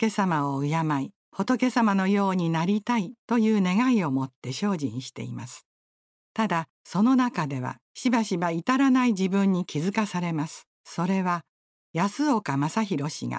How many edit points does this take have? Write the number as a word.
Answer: six